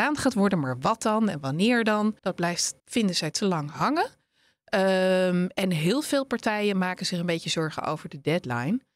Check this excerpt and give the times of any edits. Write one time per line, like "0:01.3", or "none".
0:02.2
0:02.8
0:03.3